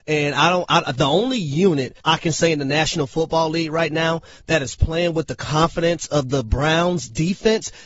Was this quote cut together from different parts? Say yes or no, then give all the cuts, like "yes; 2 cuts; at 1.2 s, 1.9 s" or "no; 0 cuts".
yes; 1 cut; at 2.0 s